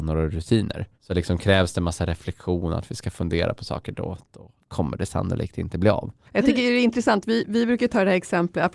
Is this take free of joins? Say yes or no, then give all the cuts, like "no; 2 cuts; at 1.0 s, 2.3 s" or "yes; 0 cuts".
no; 3 cuts; at 0.9 s, 4.6 s, 6.2 s